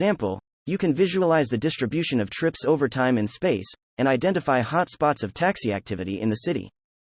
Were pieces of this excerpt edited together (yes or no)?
no